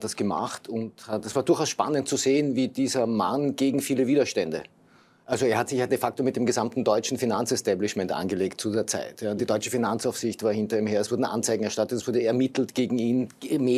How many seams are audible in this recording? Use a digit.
0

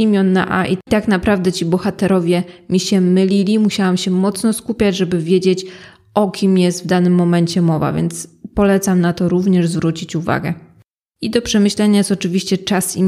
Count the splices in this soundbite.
0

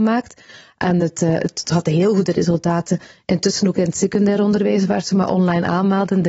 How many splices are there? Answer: 0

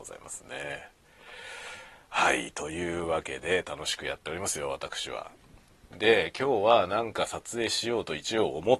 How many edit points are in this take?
1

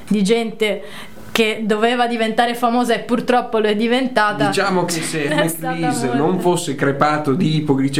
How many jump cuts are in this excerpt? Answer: 1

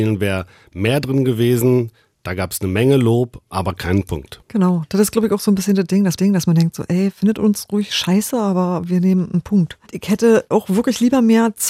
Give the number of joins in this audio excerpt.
2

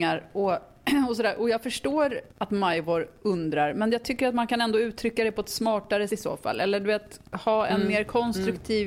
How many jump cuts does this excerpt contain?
2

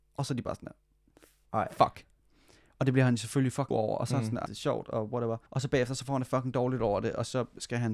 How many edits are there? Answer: 3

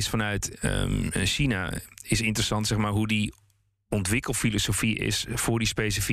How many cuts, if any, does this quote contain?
0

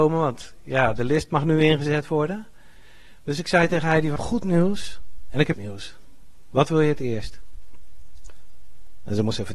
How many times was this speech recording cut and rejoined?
2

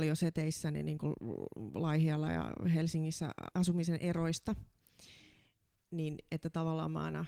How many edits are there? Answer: 1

